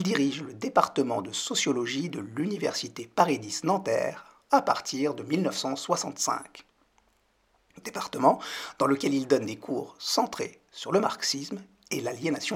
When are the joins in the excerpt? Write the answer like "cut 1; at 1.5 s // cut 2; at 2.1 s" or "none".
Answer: none